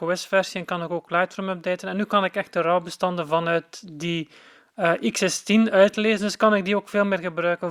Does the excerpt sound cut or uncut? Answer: uncut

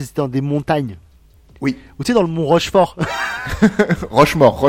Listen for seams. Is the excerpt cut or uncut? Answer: uncut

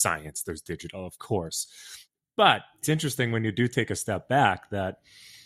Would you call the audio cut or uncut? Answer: cut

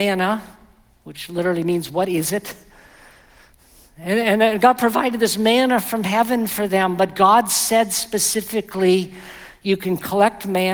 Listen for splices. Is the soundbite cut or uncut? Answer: uncut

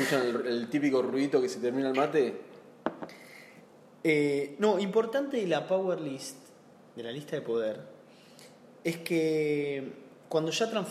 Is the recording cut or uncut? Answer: uncut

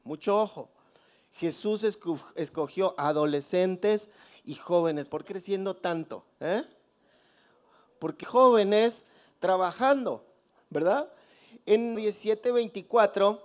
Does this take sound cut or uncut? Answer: cut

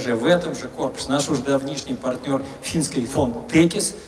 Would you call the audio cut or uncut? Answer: cut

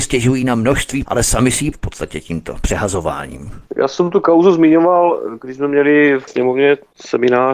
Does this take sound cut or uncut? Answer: cut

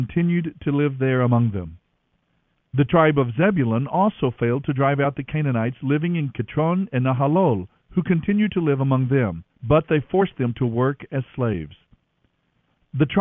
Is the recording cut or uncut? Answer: uncut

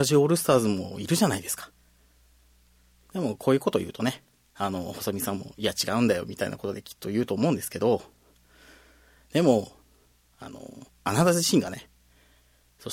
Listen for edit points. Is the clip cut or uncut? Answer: cut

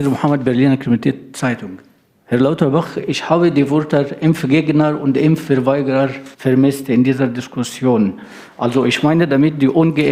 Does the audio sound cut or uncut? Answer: cut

